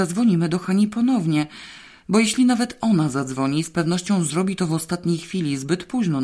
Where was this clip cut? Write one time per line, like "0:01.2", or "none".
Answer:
none